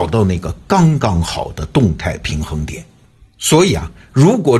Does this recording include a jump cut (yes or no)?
no